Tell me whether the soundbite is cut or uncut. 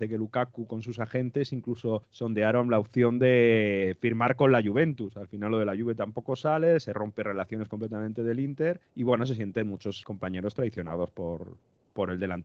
cut